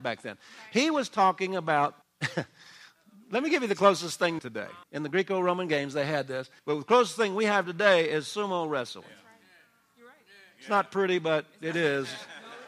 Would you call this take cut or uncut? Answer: cut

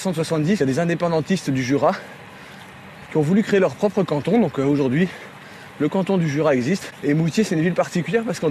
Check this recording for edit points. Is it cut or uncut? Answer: uncut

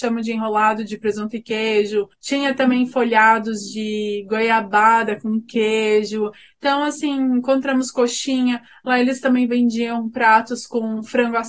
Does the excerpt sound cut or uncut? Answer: uncut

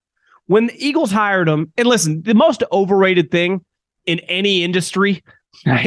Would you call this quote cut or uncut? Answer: uncut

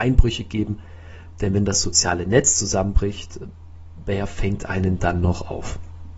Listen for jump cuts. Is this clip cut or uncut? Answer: uncut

